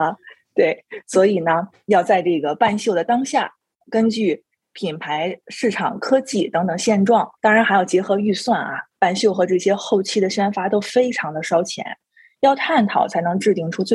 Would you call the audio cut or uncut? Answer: cut